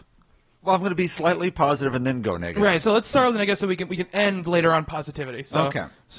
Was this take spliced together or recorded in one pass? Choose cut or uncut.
uncut